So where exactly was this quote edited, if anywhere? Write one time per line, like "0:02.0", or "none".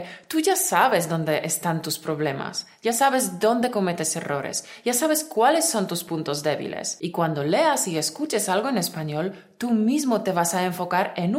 none